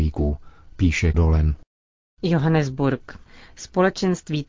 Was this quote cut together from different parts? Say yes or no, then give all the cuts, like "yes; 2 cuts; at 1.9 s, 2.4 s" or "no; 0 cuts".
yes; 1 cut; at 1.1 s